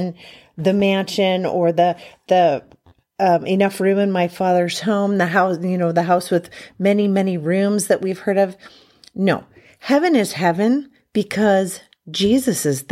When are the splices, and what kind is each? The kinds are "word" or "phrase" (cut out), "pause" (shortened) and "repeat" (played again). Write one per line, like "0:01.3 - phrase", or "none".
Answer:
none